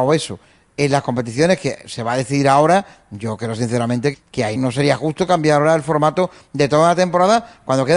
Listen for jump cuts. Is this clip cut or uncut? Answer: cut